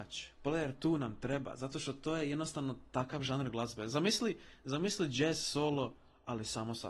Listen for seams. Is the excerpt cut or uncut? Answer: uncut